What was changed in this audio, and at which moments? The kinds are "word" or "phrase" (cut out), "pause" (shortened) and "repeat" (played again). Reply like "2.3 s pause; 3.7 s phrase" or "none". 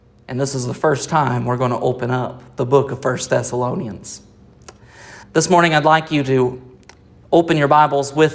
5.2 s pause